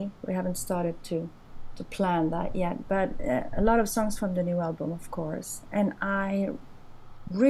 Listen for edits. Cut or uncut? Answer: uncut